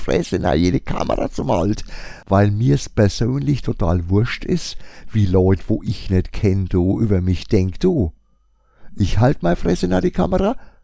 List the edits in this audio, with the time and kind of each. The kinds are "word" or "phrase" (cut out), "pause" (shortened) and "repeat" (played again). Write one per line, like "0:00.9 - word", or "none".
none

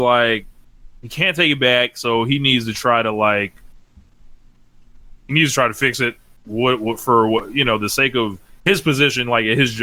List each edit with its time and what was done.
none

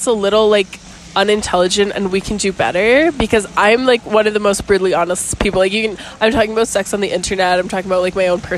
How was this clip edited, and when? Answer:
none

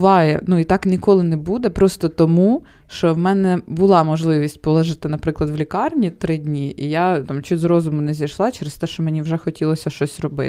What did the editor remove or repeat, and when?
0:07.2 - word

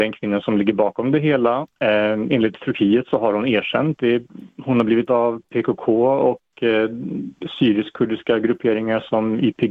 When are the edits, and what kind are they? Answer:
0:04.0 - word
0:05.1 - word

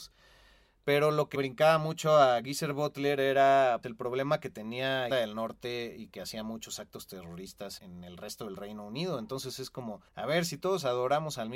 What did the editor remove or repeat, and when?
0:01.3 - word
0:03.8 - word
0:05.1 - word
0:07.8 - word
0:10.1 - pause

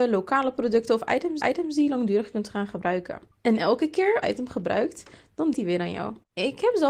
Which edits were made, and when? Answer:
0:01.4 - repeat
0:04.2 - phrase
0:05.5 - word

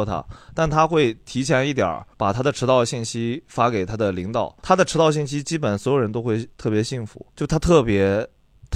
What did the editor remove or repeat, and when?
0:02.1 - pause
0:04.6 - pause
0:06.5 - pause
0:07.3 - pause

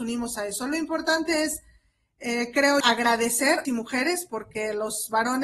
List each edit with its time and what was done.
0:02.8 - word
0:03.7 - word

